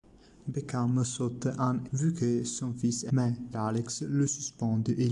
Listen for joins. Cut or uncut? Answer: cut